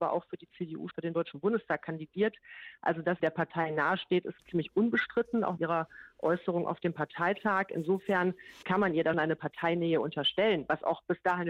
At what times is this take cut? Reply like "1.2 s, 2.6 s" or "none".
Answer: 0.9 s, 3.2 s, 4.4 s, 5.6 s, 8.6 s, 9.1 s